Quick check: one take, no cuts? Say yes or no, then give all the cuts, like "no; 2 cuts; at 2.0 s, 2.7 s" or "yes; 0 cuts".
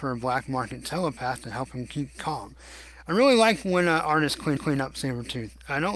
no; 1 cut; at 4.6 s